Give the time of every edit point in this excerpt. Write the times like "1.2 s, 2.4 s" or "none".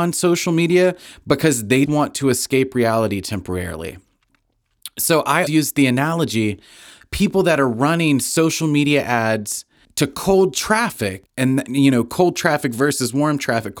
1.9 s, 5.5 s